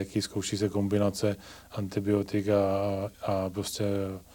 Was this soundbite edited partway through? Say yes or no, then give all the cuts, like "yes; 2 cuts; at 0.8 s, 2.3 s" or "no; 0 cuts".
yes; 1 cut; at 3.1 s